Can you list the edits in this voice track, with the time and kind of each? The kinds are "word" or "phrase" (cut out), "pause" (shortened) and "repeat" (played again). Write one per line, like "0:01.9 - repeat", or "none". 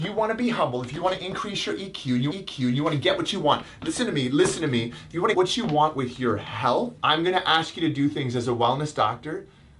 0:02.3 - repeat
0:05.3 - word
0:07.0 - pause